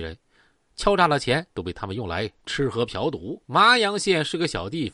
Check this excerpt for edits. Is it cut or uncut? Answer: cut